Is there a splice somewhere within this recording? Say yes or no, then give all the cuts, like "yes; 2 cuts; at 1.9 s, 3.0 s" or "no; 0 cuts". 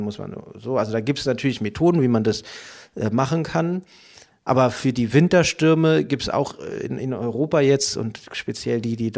no; 0 cuts